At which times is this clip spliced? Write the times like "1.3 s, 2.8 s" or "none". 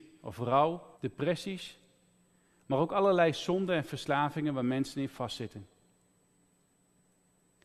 0.9 s

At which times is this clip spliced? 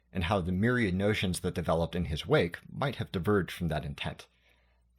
none

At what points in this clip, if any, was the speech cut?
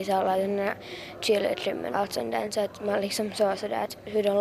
1.9 s

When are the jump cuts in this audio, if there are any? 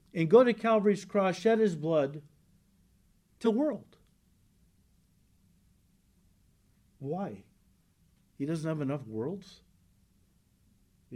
3.4 s

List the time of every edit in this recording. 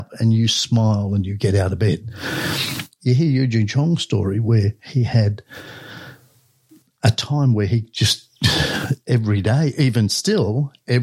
none

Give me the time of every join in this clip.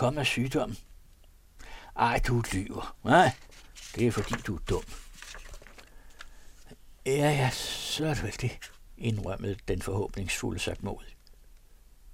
none

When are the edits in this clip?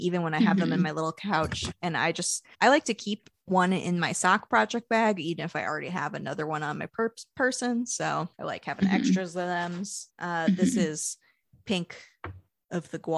2.5 s, 3.3 s, 8.3 s, 10.1 s

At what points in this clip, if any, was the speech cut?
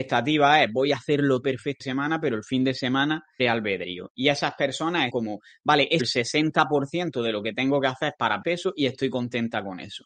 1.4 s, 1.8 s, 3.4 s, 5.1 s, 6.0 s, 8.4 s

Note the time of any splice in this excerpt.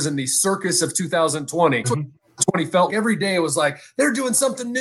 1.8 s, 2.9 s

